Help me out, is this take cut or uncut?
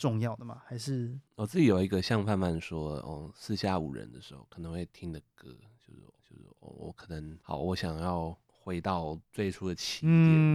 cut